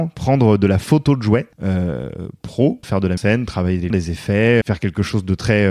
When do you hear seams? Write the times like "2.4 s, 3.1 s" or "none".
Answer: 1.5 s, 2.8 s, 3.2 s, 3.9 s, 4.6 s